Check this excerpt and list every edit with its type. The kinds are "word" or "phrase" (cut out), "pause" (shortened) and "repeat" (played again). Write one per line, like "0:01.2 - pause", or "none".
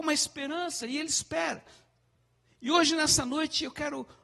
none